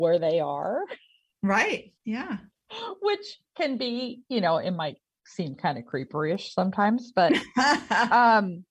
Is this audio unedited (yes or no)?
no